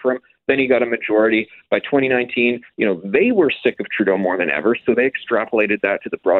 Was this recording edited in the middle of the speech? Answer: no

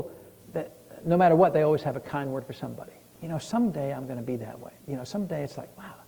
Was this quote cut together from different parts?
yes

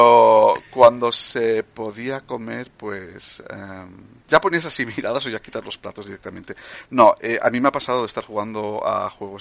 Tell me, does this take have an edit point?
yes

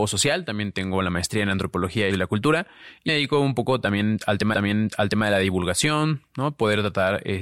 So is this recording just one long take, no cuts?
no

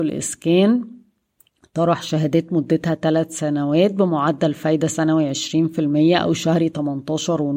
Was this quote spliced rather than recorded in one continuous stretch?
no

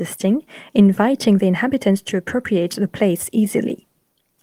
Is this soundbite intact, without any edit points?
yes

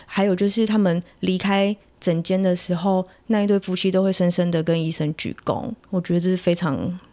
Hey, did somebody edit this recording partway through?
yes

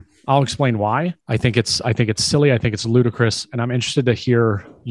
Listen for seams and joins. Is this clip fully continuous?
no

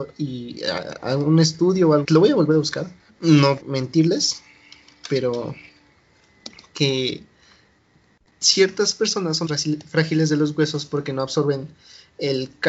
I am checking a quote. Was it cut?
yes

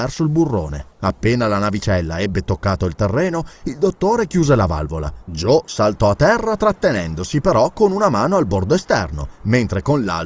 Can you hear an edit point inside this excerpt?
yes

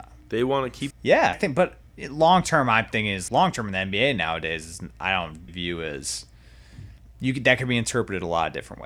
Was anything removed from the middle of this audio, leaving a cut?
yes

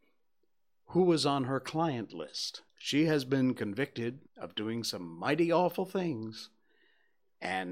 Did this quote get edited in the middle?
yes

